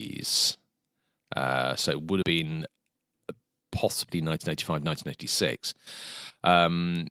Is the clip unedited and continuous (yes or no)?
no